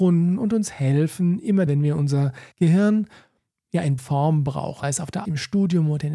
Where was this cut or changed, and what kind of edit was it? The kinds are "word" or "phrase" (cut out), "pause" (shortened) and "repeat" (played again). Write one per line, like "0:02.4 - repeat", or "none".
0:01.7 - word
0:02.5 - pause
0:04.0 - word
0:04.8 - word
0:05.2 - word

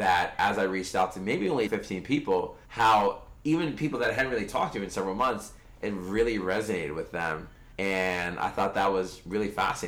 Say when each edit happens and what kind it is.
0:01.7 - phrase
0:02.6 - pause
0:07.7 - pause

